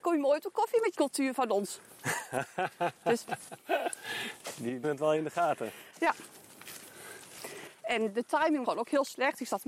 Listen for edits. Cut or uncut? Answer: cut